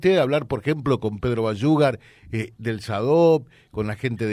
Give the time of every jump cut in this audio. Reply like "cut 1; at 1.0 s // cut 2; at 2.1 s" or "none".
none